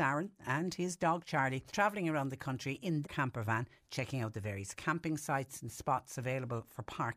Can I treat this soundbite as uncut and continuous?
no; 2 cuts; at 1.7 s, 3.0 s

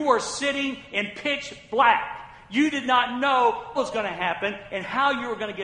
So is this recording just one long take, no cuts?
no; 1 cut; at 3.7 s

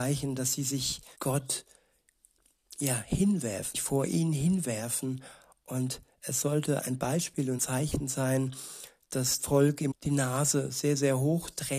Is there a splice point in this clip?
yes; 6 cuts; at 1.1 s, 3.7 s, 6.8 s, 7.6 s, 9.4 s, 9.9 s

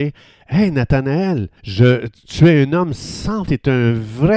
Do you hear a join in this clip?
yes; 2 cuts; at 1.6 s, 3.4 s

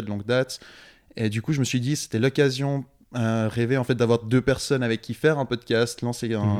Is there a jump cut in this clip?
no; 0 cuts

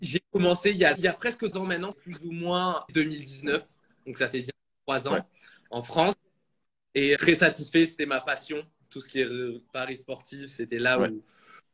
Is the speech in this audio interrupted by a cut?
yes; 6 cuts; at 1.0 s, 1.5 s, 1.9 s, 2.9 s, 7.2 s, 9.7 s

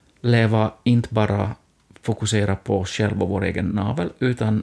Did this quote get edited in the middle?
no; 0 cuts

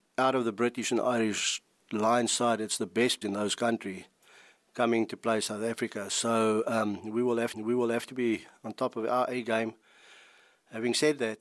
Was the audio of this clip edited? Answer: yes; 2 cuts; at 3.2 s, 7.5 s

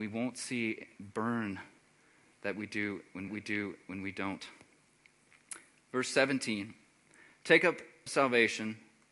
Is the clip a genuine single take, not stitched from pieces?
no; 3 cuts; at 1.0 s, 3.3 s, 8.1 s

